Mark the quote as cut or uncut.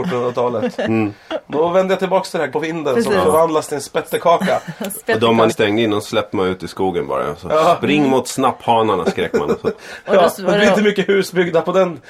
cut